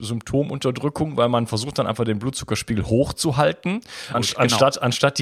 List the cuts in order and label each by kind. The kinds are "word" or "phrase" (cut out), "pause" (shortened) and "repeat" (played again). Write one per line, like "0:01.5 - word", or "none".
0:04.1 - word